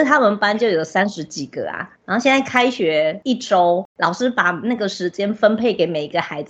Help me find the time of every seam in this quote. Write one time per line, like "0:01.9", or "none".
0:02.0
0:03.9